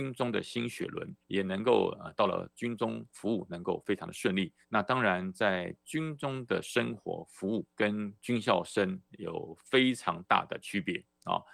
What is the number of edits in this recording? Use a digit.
3